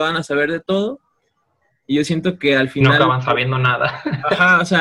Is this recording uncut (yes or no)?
yes